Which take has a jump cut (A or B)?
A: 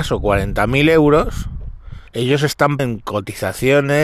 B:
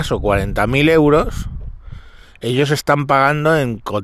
A